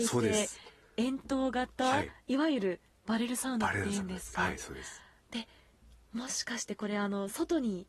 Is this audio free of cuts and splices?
yes; 0 cuts

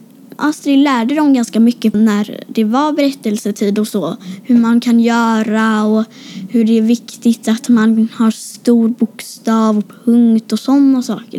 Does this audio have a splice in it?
yes; 1 cut; at 1.9 s

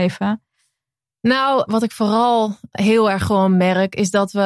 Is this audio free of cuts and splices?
no; 2 cuts; at 1.7 s, 2.7 s

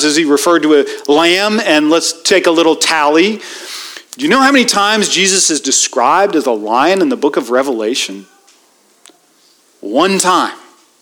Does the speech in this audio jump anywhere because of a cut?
no; 0 cuts

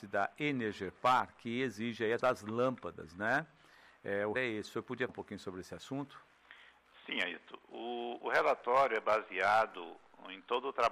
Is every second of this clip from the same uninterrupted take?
no; 3 cuts; at 2.2 s, 4.3 s, 5.1 s

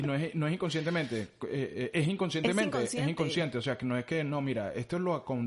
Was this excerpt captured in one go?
yes; 0 cuts

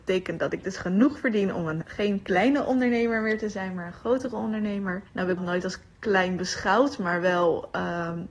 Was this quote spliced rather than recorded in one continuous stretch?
yes; 3 cuts; at 1.8 s, 5.1 s, 5.4 s

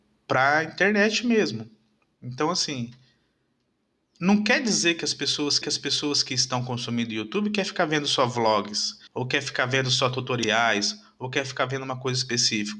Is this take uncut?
no; 2 cuts; at 5.6 s, 9.1 s

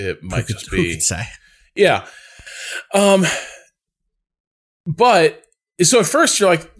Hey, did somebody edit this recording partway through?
no; 0 cuts

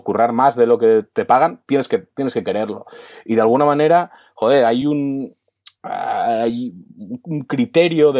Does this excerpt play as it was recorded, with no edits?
yes; 0 cuts

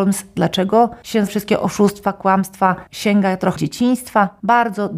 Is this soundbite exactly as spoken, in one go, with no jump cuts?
no; 2 cuts; at 1.3 s, 3.6 s

